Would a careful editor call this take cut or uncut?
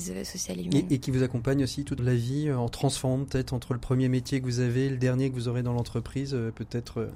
cut